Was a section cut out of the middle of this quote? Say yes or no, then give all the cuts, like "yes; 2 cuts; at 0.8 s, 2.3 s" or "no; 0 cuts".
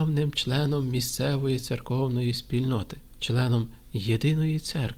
no; 0 cuts